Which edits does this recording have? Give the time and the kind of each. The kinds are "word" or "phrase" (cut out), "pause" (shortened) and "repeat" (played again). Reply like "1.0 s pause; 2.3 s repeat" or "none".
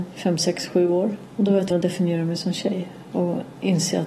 1.7 s word